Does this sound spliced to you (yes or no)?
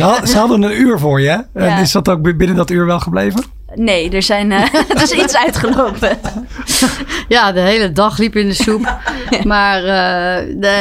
no